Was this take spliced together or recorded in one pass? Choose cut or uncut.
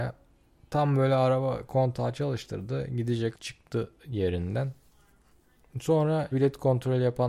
cut